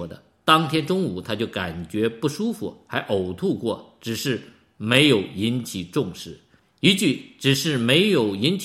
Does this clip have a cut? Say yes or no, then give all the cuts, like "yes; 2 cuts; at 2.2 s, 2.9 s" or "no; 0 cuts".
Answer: no; 0 cuts